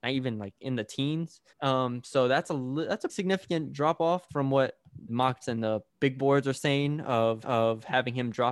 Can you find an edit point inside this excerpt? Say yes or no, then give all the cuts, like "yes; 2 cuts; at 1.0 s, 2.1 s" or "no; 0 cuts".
yes; 7 cuts; at 1.5 s, 3.1 s, 4.3 s, 5.1 s, 5.4 s, 5.9 s, 7.4 s